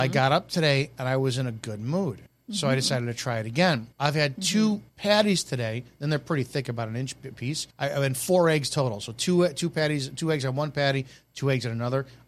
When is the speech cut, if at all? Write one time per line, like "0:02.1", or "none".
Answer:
0:02.3
0:03.9
0:04.9
0:07.7